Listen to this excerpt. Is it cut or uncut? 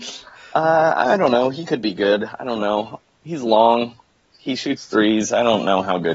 uncut